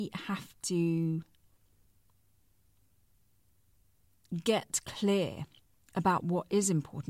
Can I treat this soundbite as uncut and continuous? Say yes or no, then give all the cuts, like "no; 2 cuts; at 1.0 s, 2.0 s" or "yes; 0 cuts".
yes; 0 cuts